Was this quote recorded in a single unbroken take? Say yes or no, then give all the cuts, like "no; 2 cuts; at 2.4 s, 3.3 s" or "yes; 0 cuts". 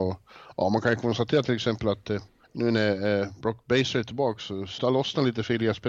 no; 2 cuts; at 2.4 s, 4.8 s